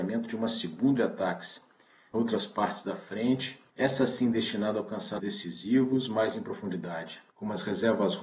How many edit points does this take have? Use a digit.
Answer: 5